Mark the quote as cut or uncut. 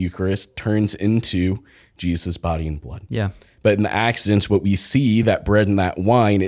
uncut